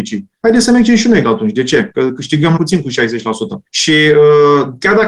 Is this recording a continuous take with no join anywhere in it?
no; 3 cuts; at 1.2 s, 2.6 s, 3.7 s

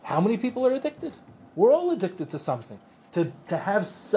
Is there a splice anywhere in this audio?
no; 0 cuts

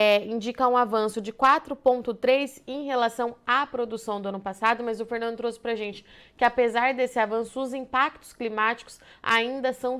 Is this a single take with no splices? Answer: yes; 0 cuts

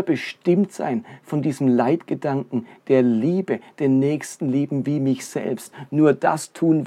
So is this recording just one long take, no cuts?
yes; 0 cuts

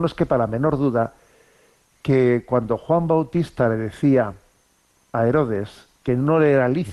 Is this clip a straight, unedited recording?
yes; 0 cuts

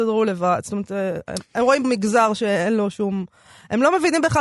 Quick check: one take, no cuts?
no; 1 cut; at 1.8 s

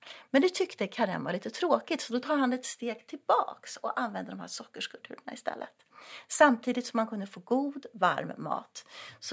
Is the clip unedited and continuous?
yes; 0 cuts

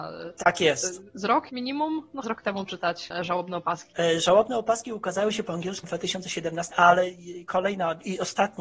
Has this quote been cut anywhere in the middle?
yes; 5 cuts; at 1.5 s, 2.2 s, 2.7 s, 5.8 s, 6.7 s

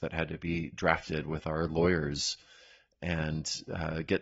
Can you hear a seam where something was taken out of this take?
no; 0 cuts

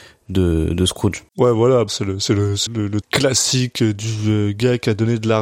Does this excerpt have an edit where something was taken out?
yes; 4 cuts; at 1.3 s, 1.9 s, 2.7 s, 3.0 s

